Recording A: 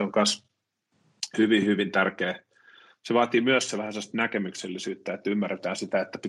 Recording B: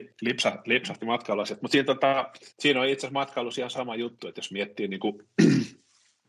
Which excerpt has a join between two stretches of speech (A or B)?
B